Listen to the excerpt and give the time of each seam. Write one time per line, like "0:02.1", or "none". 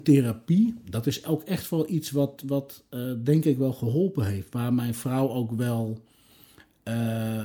none